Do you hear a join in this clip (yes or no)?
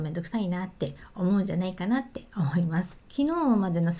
yes